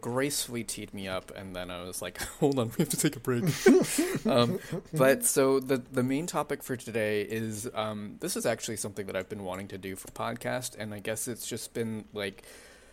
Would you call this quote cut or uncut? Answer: cut